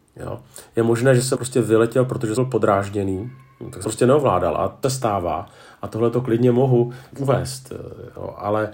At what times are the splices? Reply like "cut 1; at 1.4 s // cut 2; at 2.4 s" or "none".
cut 1; at 1.3 s // cut 2; at 2.4 s // cut 3; at 3.8 s // cut 4; at 4.8 s // cut 5; at 7.1 s